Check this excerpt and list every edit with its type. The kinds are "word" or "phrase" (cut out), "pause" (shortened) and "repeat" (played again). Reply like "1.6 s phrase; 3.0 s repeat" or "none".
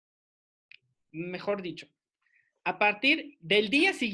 none